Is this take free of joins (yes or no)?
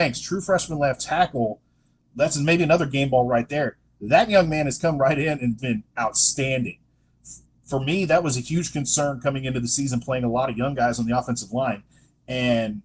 no